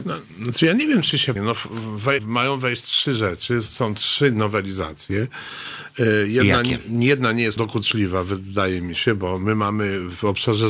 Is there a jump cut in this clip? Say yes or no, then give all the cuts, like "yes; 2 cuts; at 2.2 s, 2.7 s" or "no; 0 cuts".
yes; 3 cuts; at 1.4 s, 2.2 s, 7.6 s